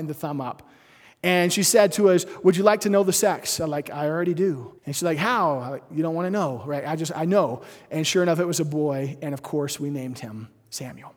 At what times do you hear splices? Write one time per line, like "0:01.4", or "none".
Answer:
0:04.8